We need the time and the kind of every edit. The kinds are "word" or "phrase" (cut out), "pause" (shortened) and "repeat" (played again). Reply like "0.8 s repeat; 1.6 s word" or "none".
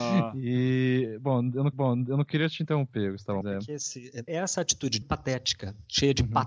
1.7 s repeat; 3.4 s phrase; 4.3 s word; 5.0 s phrase